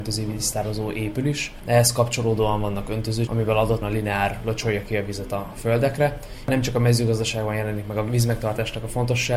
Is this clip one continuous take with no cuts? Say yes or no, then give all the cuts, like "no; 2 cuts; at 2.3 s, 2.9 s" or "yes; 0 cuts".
no; 2 cuts; at 3.3 s, 3.8 s